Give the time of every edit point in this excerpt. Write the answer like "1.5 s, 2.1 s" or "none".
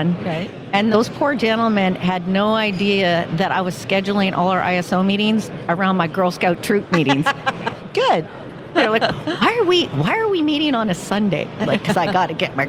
0.9 s, 11.7 s